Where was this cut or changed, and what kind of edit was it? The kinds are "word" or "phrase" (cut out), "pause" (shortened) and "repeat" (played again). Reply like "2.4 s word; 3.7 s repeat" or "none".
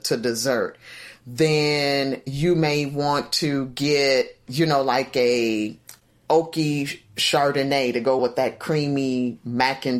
8.2 s word

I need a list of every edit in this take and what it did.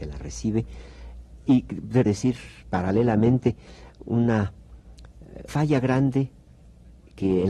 2.1 s word; 2.6 s word; 5.5 s word

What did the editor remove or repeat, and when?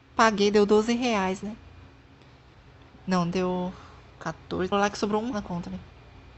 4.7 s phrase; 5.3 s word

